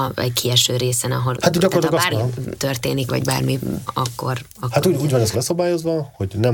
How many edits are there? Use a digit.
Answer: 6